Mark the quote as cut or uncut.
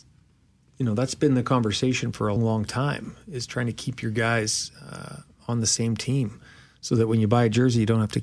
cut